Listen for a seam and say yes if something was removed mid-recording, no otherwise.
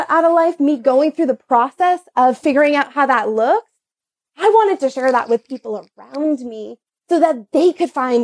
no